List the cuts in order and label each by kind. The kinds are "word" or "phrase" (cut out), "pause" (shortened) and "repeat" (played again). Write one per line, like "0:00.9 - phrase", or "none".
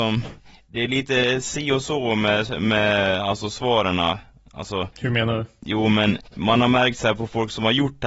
0:04.9 - pause
0:06.3 - pause

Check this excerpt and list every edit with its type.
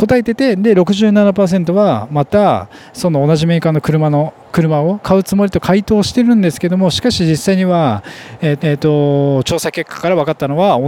0:08.6 - repeat

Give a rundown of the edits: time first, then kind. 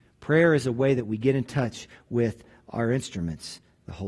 none

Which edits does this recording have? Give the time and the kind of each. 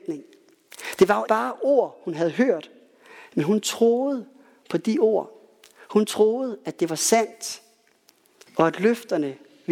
0:01.3 - word

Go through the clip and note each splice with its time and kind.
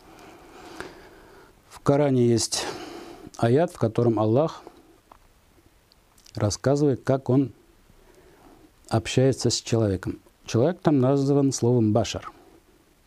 none

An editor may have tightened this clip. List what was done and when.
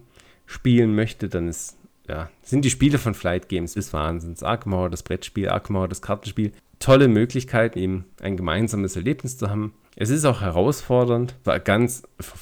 0:03.2 - word
0:03.8 - word
0:07.8 - word
0:11.4 - word

